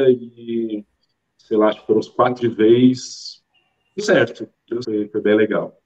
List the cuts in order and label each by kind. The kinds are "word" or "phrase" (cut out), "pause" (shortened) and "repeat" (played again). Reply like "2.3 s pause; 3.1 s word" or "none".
2.4 s phrase; 4.0 s word; 4.8 s word

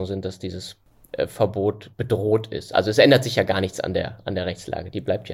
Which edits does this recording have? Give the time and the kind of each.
1.9 s word

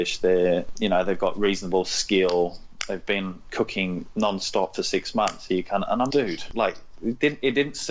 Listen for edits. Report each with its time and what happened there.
6.1 s word

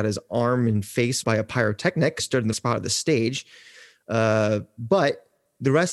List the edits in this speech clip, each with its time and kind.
1.2 s word; 2.2 s word; 2.5 s word

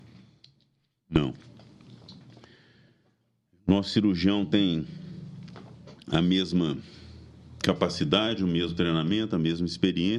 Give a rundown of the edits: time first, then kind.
none

